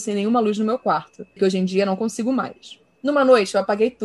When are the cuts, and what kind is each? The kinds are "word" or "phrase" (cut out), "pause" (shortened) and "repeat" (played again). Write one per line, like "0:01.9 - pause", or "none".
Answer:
0:01.4 - word
0:02.9 - pause